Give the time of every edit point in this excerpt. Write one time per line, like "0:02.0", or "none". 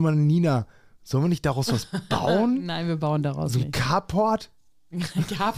none